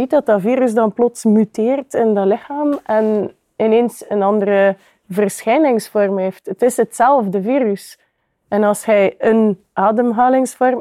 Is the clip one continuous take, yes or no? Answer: yes